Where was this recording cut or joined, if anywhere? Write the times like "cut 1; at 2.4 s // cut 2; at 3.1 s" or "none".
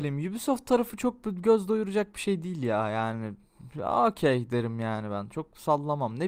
none